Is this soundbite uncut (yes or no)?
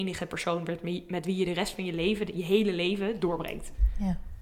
yes